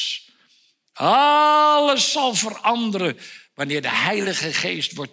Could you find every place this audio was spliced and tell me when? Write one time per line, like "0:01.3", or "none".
none